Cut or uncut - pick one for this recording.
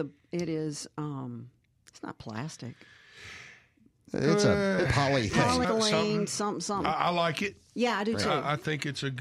cut